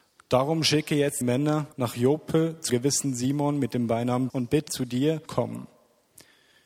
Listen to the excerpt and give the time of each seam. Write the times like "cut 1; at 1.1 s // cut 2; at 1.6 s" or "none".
cut 1; at 1.2 s // cut 2; at 1.7 s // cut 3; at 2.7 s // cut 4; at 4.3 s // cut 5; at 4.7 s // cut 6; at 5.3 s